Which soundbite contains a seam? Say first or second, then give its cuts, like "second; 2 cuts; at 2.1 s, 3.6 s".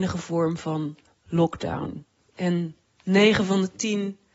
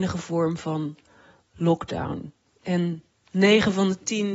first; 1 cut; at 1.1 s